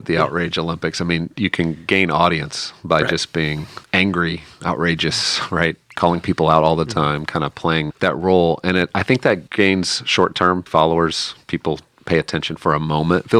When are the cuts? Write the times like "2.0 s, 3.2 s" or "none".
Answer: 3.8 s, 7.9 s, 9.5 s, 10.7 s